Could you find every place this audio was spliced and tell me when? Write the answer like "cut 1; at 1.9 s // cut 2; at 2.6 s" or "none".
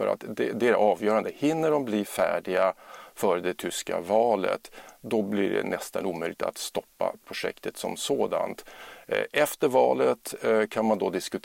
none